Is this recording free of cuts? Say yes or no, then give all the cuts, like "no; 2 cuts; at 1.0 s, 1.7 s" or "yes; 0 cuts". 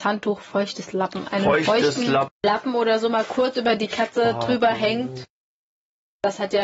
no; 1 cut; at 2.3 s